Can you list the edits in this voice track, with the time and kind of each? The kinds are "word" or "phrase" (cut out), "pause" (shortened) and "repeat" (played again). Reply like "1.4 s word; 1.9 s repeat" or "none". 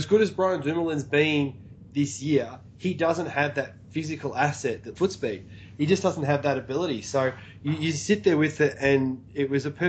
5.0 s phrase